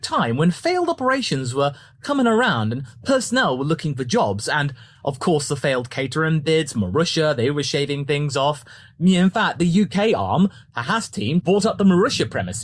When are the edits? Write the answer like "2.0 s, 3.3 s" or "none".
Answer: 11.4 s